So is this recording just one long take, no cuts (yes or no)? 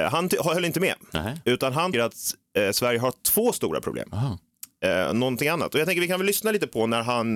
no